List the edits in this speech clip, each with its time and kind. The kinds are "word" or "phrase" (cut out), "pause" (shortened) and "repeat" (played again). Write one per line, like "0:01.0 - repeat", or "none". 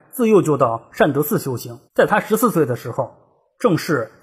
0:01.9 - pause